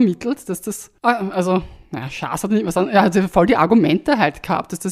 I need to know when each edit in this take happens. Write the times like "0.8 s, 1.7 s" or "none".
1.0 s